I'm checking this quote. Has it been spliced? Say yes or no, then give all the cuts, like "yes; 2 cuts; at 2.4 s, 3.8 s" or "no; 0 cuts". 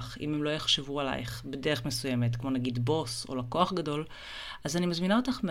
no; 0 cuts